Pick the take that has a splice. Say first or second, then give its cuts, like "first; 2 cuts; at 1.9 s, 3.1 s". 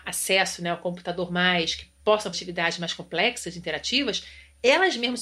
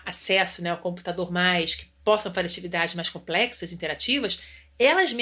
first; 1 cut; at 2.3 s